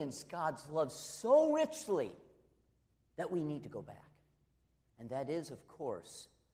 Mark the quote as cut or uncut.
uncut